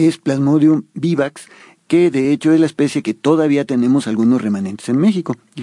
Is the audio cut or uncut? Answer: uncut